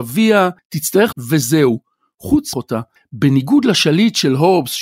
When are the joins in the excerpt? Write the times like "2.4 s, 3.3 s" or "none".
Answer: 1.1 s, 2.5 s